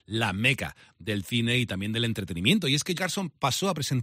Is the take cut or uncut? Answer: cut